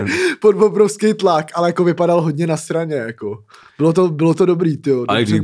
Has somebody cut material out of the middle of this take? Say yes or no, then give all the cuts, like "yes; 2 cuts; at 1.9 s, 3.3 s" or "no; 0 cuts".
no; 0 cuts